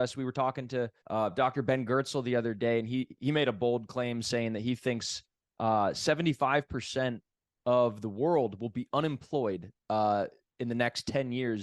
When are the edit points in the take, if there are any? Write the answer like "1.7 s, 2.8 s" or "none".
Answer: 1.0 s

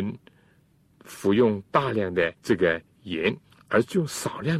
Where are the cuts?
2.4 s, 3.4 s

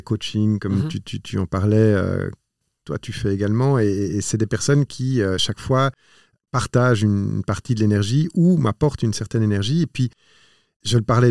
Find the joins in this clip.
none

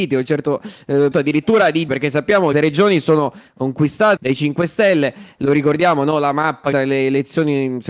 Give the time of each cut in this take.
1.1 s, 1.9 s, 2.5 s, 4.2 s, 6.7 s

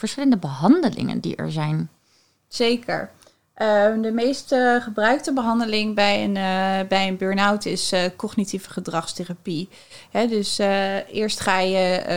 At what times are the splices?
none

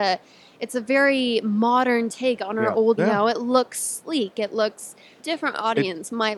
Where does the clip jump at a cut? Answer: 3.0 s, 5.2 s

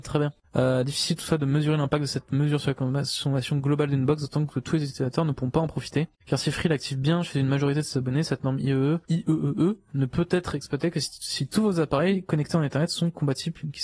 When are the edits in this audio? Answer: 9.0 s

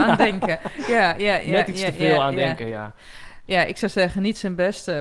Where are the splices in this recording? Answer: none

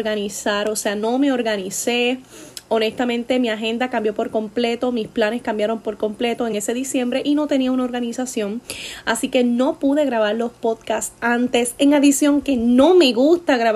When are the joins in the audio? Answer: none

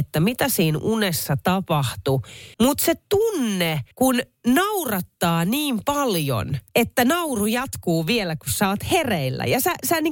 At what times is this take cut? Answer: 2.5 s, 3.9 s, 6.7 s

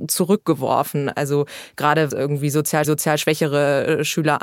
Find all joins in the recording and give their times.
2.1 s, 2.8 s

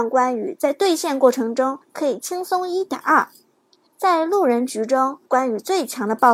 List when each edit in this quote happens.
1.8 s, 3.5 s, 5.3 s

